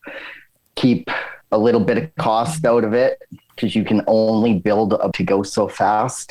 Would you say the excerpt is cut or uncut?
cut